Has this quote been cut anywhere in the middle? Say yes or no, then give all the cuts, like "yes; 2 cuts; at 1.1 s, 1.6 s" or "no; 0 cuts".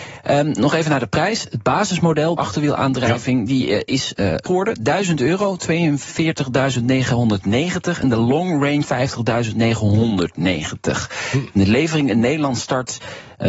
yes; 4 cuts; at 2.4 s, 4.2 s, 4.5 s, 8.8 s